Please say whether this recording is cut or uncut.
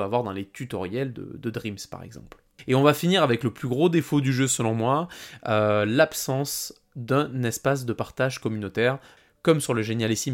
uncut